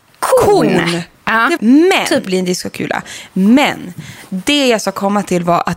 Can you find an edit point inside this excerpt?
yes; 3 cuts; at 1.1 s, 1.6 s, 2.3 s

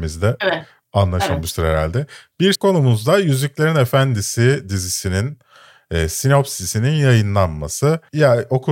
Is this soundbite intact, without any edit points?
no; 1 cut; at 2.5 s

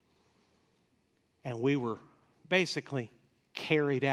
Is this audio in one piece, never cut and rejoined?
yes; 0 cuts

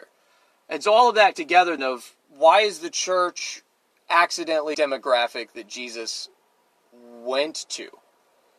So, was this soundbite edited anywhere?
yes; 3 cuts; at 1.3 s, 1.8 s, 4.7 s

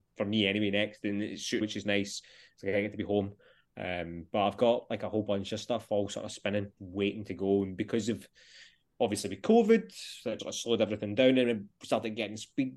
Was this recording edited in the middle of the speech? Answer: yes; 3 cuts; at 1.6 s, 6.8 s, 10.4 s

